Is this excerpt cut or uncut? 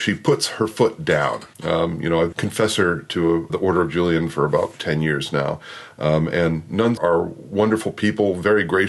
cut